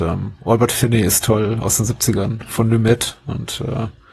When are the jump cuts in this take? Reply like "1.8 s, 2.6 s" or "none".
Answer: none